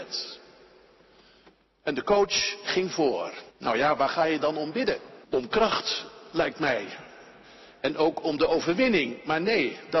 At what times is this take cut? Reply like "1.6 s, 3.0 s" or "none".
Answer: 3.5 s, 5.2 s